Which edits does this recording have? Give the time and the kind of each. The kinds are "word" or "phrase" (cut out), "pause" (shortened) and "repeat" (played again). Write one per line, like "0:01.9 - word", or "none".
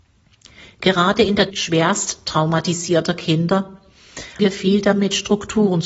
0:01.5 - word
0:04.4 - word